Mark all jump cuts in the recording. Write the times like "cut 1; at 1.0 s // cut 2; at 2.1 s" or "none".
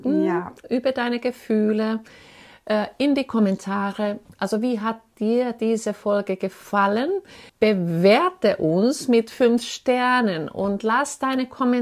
cut 1; at 7.5 s